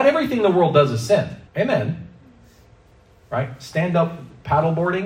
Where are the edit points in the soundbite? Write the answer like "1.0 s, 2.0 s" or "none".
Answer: 1.5 s

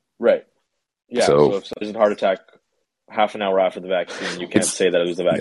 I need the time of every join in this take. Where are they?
1.8 s

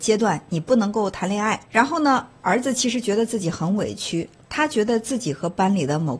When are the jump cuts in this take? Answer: 1.6 s

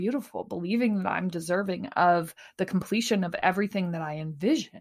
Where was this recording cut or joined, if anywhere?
none

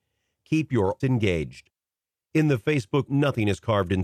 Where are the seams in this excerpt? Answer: 1.0 s, 3.1 s

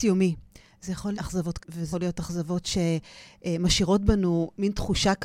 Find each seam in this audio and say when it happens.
1.1 s, 1.6 s, 1.9 s

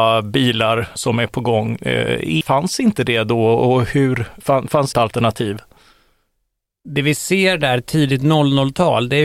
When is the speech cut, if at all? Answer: 1.0 s, 2.4 s, 4.4 s, 4.9 s

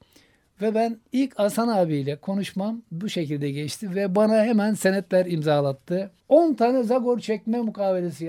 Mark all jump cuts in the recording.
6.2 s

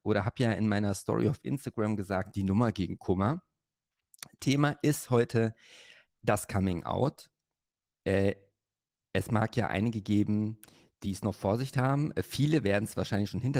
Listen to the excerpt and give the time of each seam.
none

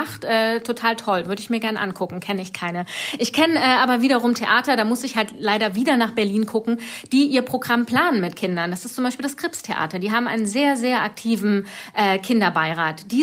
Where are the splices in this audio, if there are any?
none

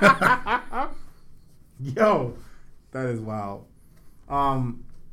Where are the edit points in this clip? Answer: 2.8 s

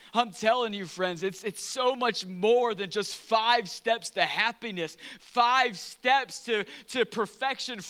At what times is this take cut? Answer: none

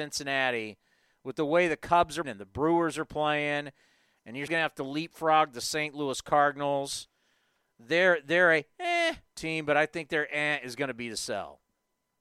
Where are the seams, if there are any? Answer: 2.2 s, 4.5 s

